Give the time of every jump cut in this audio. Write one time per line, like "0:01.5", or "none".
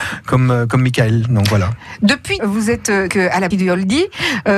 0:02.4
0:03.1
0:03.5